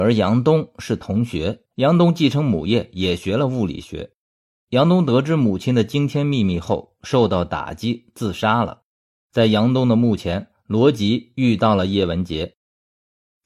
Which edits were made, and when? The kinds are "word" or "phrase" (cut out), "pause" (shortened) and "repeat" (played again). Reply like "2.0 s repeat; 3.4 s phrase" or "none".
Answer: 1.7 s pause